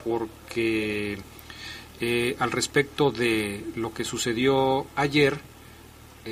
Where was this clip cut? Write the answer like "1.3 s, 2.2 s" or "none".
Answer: none